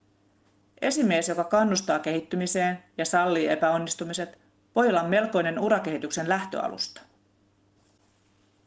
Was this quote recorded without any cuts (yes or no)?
yes